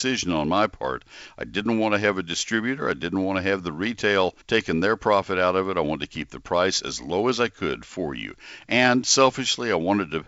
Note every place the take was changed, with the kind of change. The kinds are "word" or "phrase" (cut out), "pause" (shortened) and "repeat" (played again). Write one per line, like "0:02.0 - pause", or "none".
0:04.4 - pause